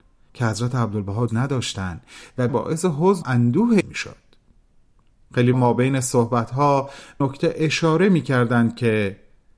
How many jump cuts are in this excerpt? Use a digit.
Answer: 6